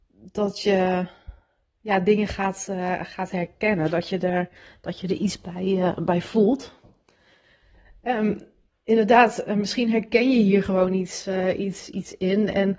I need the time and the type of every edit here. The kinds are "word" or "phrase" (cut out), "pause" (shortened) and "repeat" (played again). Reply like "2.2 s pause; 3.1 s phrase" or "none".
none